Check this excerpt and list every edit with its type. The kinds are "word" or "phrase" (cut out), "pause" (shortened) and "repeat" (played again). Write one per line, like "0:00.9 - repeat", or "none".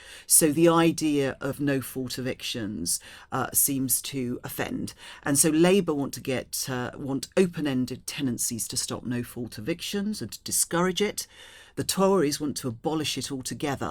none